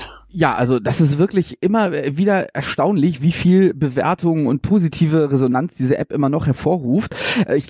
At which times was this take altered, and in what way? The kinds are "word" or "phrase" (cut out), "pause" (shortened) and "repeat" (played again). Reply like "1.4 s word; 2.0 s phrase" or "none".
none